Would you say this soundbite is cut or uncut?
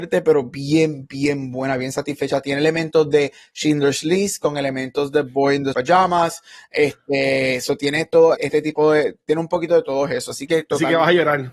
cut